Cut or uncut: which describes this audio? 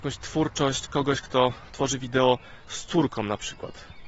uncut